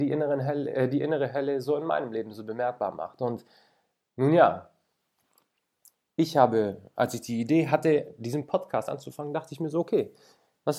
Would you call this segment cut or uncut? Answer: uncut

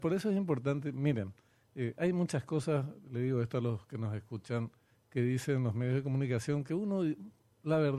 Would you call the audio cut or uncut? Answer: uncut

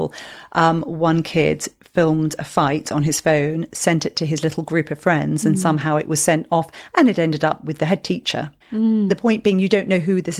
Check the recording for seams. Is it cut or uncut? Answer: cut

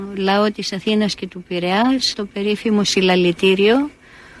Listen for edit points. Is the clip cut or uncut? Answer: cut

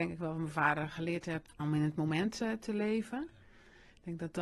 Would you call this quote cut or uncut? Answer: cut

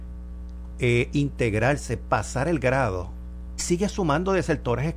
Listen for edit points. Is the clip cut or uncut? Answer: cut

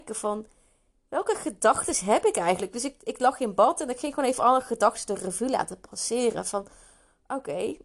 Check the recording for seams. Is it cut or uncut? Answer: uncut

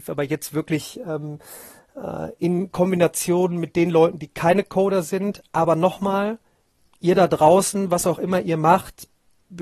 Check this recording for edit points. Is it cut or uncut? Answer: uncut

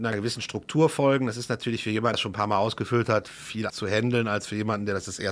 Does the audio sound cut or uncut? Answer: cut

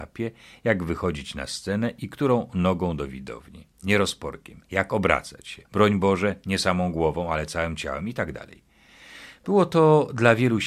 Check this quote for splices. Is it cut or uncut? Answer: cut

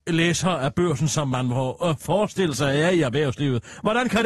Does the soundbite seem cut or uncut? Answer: uncut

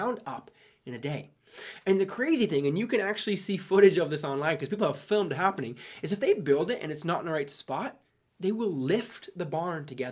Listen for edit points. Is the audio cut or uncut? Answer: uncut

